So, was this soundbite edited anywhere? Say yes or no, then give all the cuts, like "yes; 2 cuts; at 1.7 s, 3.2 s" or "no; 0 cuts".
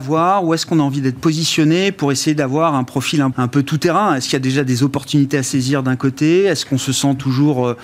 yes; 1 cut; at 3.3 s